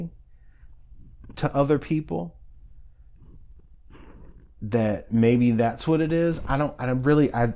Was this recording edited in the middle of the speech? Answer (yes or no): no